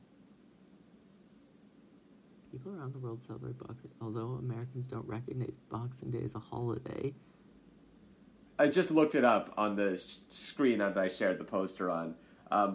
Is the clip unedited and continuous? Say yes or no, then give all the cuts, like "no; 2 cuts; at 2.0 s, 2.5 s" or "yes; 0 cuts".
yes; 0 cuts